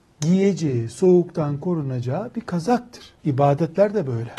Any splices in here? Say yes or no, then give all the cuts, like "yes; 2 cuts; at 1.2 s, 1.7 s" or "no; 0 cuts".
yes; 1 cut; at 3.2 s